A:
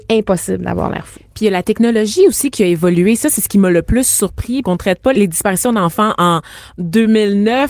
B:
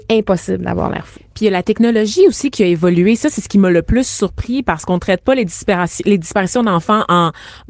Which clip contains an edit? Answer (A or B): A